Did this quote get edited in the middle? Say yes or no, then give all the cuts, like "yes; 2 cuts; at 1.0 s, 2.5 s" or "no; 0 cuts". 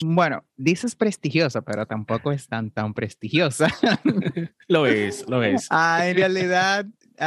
yes; 1 cut; at 2.5 s